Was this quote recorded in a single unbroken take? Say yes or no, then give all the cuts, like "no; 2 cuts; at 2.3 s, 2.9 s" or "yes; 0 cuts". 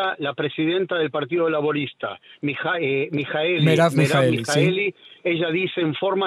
yes; 0 cuts